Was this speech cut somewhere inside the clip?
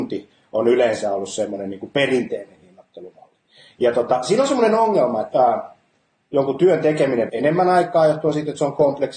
yes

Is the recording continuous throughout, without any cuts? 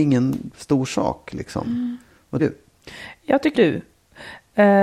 no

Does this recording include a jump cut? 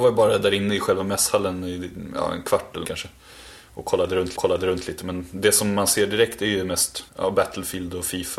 yes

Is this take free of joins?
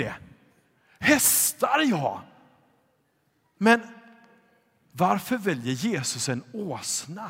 yes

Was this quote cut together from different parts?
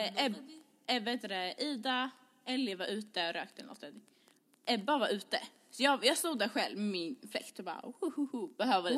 no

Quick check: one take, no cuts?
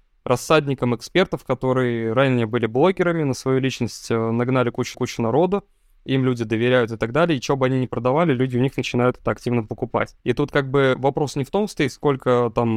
no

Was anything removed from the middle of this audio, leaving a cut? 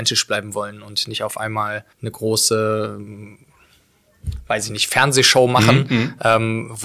yes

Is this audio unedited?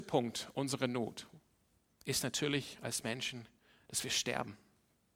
yes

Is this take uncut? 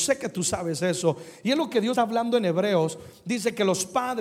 no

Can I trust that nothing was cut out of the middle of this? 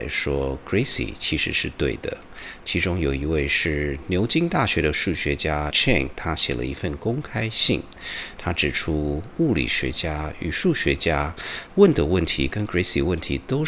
no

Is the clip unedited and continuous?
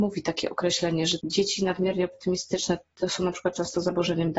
no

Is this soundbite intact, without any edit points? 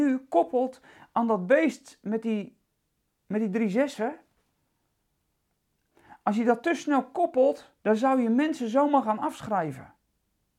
no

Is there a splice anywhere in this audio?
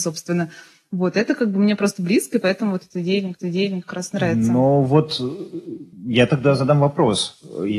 yes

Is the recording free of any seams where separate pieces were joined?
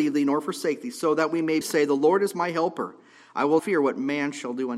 no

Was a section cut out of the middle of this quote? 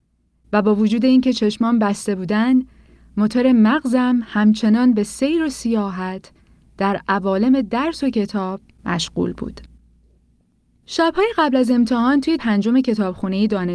yes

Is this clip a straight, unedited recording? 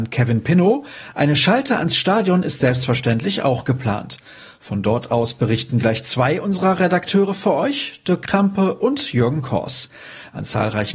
yes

